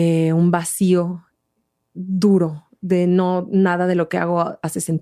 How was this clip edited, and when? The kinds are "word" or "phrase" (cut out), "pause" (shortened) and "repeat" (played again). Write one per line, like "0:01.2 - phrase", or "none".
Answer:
none